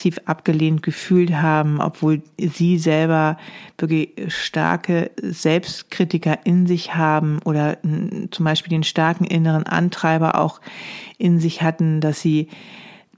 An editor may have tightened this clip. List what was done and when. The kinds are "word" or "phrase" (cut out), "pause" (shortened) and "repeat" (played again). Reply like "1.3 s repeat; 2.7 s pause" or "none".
5.2 s word